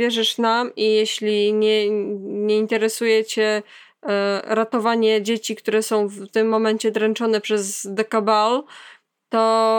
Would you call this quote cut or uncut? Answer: uncut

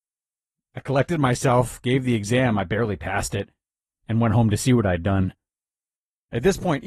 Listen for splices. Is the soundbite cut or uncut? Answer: uncut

